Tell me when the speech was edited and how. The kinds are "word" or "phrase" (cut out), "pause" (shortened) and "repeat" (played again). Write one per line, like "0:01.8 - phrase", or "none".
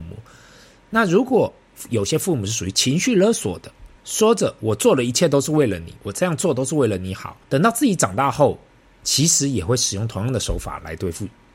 0:04.0 - pause
0:07.4 - pause